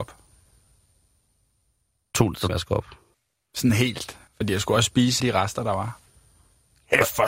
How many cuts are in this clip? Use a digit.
4